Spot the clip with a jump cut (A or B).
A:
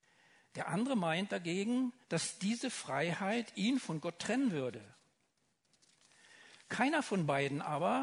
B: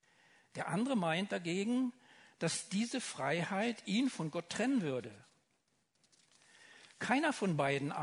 A